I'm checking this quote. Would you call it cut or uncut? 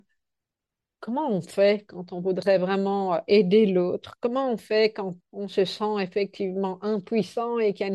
cut